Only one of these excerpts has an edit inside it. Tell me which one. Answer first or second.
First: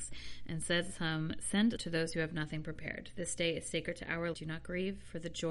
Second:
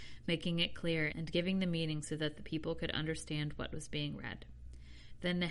first